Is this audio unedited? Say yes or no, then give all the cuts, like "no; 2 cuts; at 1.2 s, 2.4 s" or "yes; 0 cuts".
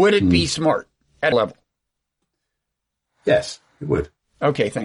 no; 1 cut; at 1.3 s